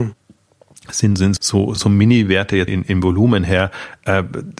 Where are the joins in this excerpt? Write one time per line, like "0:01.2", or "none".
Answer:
0:01.4
0:01.8
0:02.7